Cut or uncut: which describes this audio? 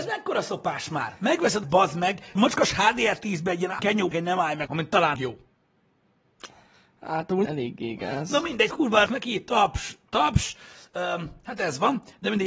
cut